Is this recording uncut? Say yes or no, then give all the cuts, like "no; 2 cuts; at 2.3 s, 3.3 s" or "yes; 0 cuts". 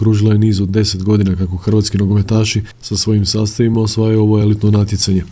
yes; 0 cuts